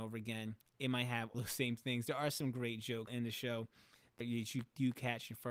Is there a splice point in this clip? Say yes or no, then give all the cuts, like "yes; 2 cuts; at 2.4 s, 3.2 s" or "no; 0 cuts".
yes; 3 cuts; at 1.3 s, 3.1 s, 4.2 s